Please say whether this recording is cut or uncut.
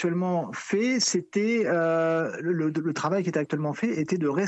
uncut